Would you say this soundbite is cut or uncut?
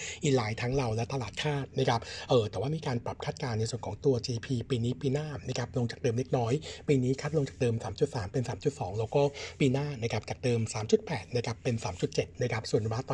uncut